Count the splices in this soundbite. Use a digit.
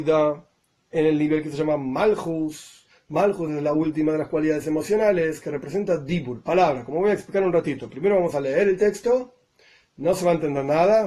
0